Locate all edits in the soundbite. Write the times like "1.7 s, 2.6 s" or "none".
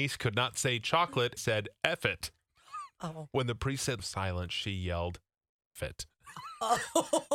1.4 s, 4.0 s, 5.8 s